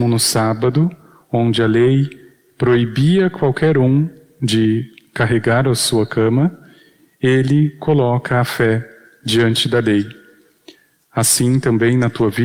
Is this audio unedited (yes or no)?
yes